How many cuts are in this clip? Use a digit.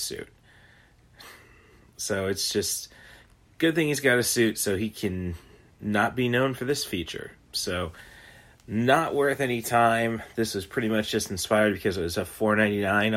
0